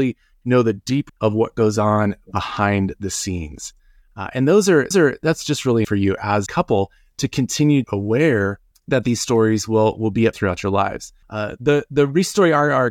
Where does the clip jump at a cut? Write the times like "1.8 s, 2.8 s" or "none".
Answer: 1.1 s, 4.9 s, 5.8 s, 6.5 s, 7.8 s, 8.7 s, 10.3 s, 11.2 s